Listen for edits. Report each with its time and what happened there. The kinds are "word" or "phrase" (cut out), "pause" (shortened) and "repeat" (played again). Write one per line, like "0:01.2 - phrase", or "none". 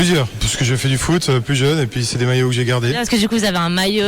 none